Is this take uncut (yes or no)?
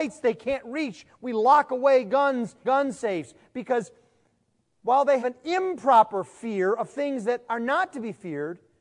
no